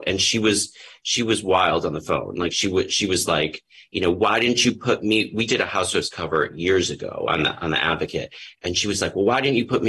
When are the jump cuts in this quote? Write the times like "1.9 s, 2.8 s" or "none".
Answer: none